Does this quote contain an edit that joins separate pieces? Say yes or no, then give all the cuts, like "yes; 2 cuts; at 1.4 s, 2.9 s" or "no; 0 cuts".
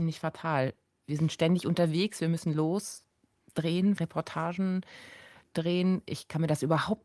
yes; 1 cut; at 4.0 s